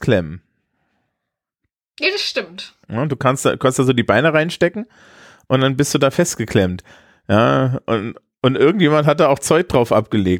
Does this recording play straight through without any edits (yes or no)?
no